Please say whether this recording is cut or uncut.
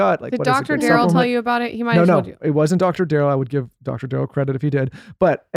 uncut